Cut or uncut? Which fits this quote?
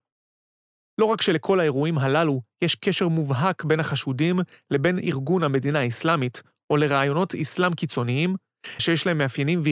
cut